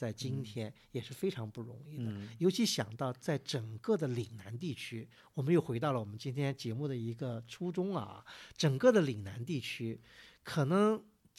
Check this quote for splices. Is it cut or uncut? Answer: uncut